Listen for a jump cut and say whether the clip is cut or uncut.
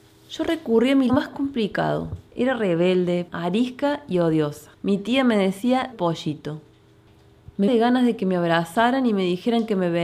cut